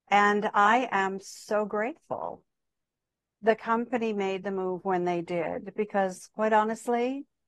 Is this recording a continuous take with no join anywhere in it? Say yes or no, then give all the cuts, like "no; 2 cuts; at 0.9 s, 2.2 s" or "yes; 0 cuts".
yes; 0 cuts